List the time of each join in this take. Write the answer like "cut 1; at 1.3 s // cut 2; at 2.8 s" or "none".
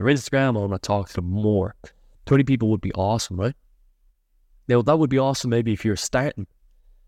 none